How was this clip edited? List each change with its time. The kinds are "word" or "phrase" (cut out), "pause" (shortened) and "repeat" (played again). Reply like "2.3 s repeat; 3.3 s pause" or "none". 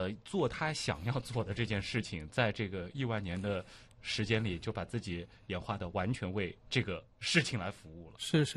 6.6 s pause; 7.1 s pause